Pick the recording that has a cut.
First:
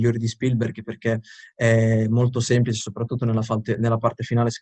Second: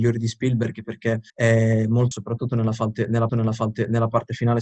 second; 3 cuts; at 1.3 s, 2.1 s, 3.3 s

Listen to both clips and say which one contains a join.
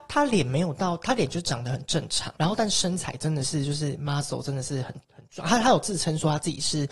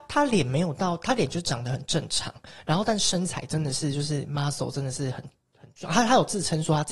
first; 2 cuts; at 2.4 s, 5.0 s

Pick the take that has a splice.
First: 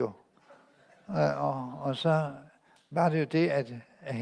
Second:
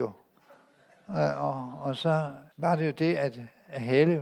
second; 1 cut; at 2.5 s

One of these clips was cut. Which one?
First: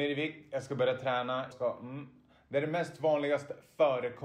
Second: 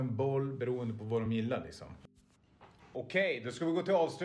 first; 1 cut; at 1.5 s

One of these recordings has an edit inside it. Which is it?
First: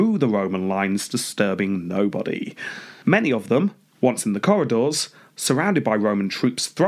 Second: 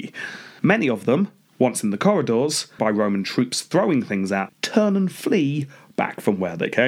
second; 2 cuts; at 2.8 s, 4.5 s

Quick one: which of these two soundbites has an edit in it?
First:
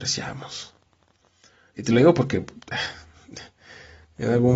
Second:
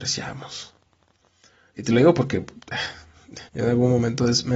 second; 1 cut; at 3.5 s

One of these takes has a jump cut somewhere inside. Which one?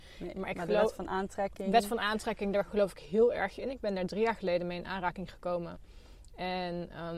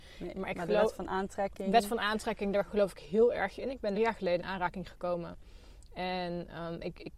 second; 2 cuts; at 3.9 s, 4.4 s

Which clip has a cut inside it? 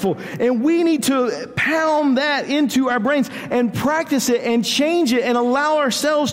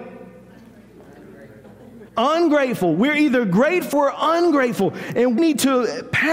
second; 3 cuts; at 2.1 s, 3.9 s, 5.4 s

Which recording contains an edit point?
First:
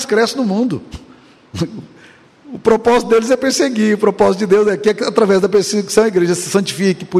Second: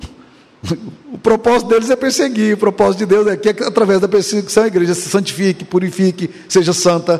second; 1 cut; at 1.0 s

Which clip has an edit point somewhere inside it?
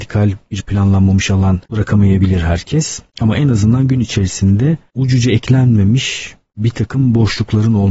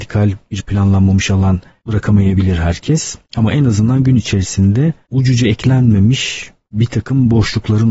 first; 1 cut; at 1.7 s

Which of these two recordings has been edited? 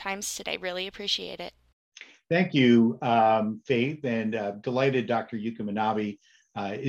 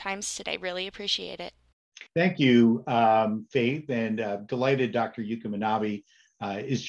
second; 1 cut; at 2.1 s

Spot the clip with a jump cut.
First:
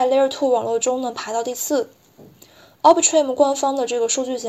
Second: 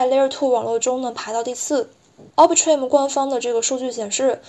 second; 1 cut; at 2.3 s

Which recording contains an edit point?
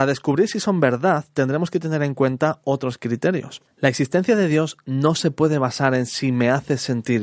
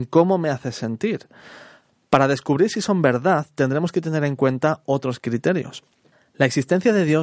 first; 1 cut; at 3.7 s

